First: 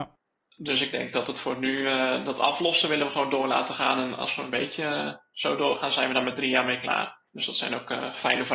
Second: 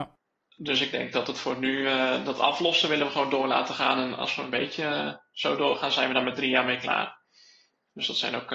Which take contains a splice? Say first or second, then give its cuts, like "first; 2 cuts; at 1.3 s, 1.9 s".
first; 1 cut; at 7.3 s